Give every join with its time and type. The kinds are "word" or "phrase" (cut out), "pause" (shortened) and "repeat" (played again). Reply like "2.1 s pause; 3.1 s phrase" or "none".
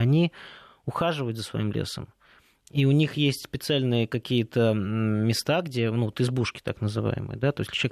none